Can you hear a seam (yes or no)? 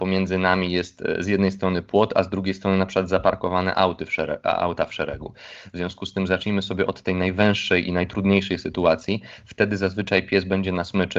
no